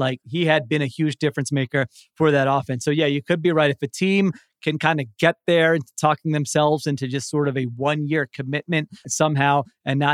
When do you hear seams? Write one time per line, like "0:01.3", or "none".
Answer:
0:09.0